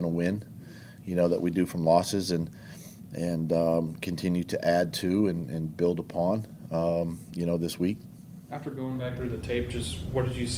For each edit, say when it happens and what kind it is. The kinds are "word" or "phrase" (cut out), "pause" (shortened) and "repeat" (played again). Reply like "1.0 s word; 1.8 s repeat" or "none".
none